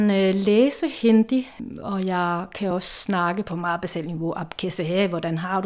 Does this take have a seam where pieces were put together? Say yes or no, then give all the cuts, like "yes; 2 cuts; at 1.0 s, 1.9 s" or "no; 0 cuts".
no; 0 cuts